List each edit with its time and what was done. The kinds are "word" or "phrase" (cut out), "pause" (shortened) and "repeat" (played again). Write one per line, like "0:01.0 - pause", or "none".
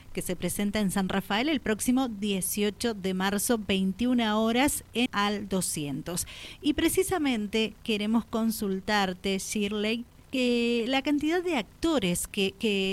0:05.1 - word